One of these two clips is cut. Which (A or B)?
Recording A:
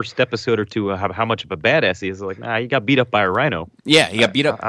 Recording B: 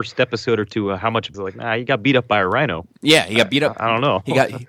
B